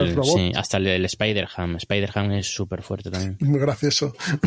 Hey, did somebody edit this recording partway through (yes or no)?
no